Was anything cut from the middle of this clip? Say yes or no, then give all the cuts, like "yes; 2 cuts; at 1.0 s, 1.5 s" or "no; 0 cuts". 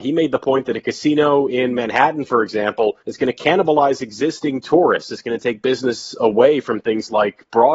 yes; 1 cut; at 3.0 s